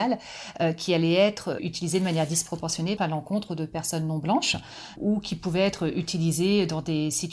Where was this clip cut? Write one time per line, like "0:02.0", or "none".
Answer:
0:01.6
0:03.0
0:05.0